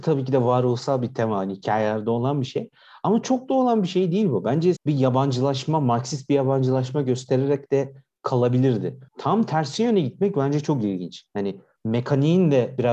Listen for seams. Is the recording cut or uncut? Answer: cut